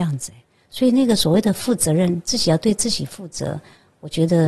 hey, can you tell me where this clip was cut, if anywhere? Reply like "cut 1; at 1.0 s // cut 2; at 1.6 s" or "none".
none